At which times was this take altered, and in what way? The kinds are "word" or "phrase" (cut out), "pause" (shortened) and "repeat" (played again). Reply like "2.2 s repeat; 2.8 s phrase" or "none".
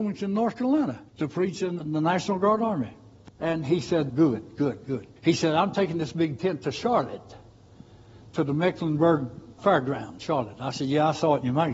1.1 s pause; 1.8 s word; 3.3 s pause; 4.1 s word; 5.2 s pause; 9.6 s word

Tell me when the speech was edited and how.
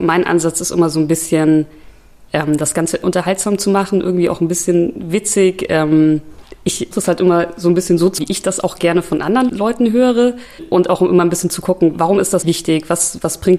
3.0 s word; 6.9 s word; 8.2 s word; 9.5 s word; 11.9 s word; 12.4 s word

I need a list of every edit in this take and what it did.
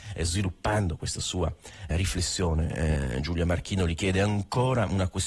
1.9 s word

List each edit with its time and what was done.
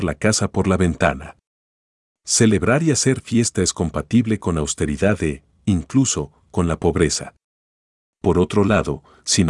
none

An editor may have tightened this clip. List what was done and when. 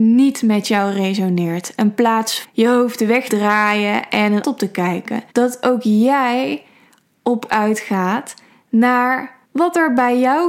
2.4 s word; 3.3 s word; 4.4 s phrase; 5.3 s pause; 7.5 s word; 9.4 s pause

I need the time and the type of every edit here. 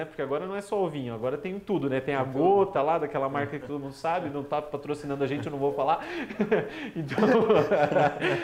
none

